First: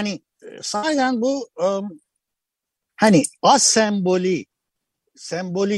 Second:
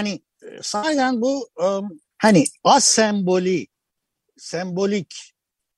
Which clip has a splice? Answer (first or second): second